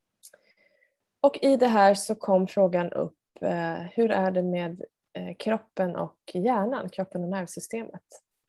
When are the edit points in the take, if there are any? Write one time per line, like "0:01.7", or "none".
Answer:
none